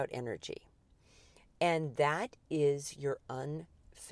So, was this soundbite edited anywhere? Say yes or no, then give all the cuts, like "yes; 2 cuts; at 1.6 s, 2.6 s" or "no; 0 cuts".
no; 0 cuts